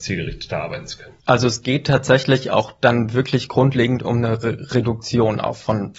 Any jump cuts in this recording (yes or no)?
yes